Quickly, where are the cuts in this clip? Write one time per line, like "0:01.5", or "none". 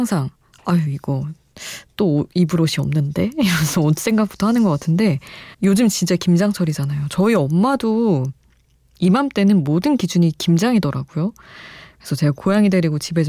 0:05.5